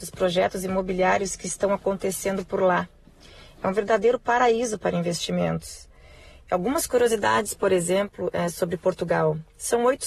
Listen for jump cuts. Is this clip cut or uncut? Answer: uncut